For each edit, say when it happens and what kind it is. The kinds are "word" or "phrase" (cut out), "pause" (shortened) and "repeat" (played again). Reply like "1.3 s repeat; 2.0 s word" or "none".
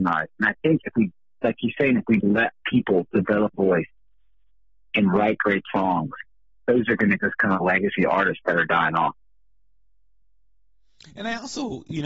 2.2 s word; 3.5 s word; 7.2 s word